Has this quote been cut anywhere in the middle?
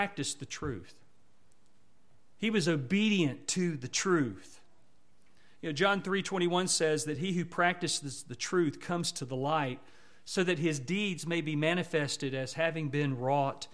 no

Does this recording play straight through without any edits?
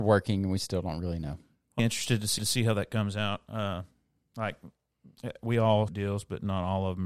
no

